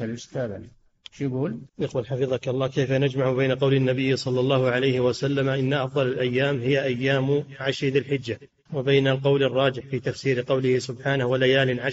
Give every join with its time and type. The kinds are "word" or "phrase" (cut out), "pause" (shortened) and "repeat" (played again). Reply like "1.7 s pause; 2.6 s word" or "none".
1.7 s pause; 8.7 s word